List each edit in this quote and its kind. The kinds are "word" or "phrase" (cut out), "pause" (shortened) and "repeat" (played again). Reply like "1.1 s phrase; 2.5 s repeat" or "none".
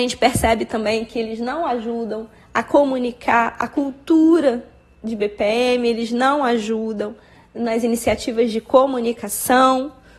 none